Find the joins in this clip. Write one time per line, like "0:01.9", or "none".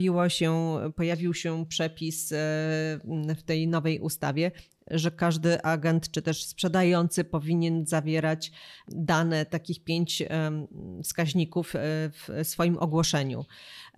none